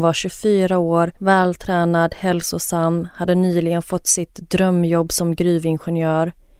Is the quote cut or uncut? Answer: cut